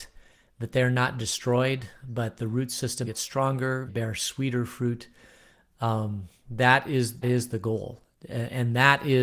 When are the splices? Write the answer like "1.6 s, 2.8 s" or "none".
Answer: 3.0 s, 3.9 s, 7.2 s